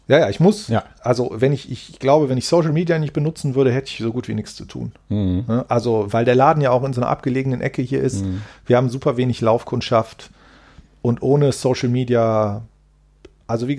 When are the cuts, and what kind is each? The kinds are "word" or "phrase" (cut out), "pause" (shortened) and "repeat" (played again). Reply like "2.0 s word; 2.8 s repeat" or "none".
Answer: none